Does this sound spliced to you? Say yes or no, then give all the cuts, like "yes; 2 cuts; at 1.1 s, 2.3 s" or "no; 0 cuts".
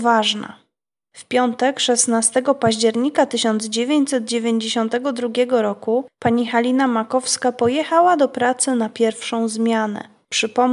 no; 0 cuts